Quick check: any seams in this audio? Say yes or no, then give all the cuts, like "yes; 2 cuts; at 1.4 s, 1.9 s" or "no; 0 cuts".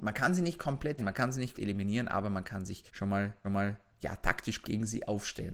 yes; 5 cuts; at 1.0 s, 1.5 s, 2.9 s, 3.4 s, 4.6 s